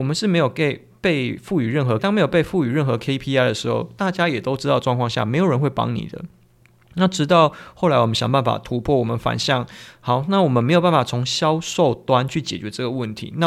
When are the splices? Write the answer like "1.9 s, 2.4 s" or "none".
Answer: 2.0 s